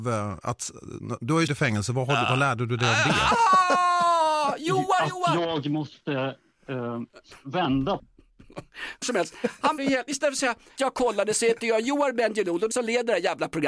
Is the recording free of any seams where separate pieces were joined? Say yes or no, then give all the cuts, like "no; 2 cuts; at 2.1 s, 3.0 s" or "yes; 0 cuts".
no; 5 cuts; at 1.5 s, 9.0 s, 9.8 s, 10.8 s, 12.7 s